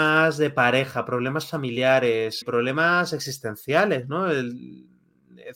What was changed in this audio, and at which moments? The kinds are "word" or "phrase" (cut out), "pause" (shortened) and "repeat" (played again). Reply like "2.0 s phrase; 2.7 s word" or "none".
2.4 s word